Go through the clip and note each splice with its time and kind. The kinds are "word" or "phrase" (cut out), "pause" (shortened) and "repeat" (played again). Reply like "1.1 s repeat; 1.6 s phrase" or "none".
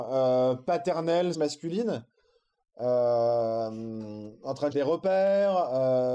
1.3 s word; 4.7 s word